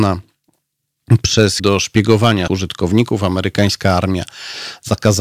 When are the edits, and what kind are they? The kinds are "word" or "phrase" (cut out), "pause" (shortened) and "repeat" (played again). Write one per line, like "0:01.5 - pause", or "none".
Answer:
0:01.6 - word
0:02.5 - word

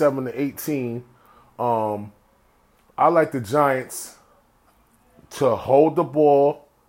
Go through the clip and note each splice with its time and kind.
none

